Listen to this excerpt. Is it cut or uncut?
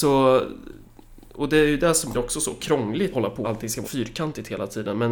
cut